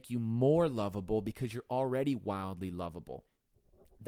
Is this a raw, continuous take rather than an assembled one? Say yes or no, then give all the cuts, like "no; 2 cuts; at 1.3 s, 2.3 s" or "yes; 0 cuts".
yes; 0 cuts